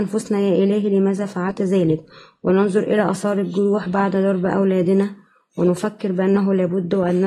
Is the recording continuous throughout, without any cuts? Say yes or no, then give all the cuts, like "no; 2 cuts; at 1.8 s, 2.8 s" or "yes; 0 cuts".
yes; 0 cuts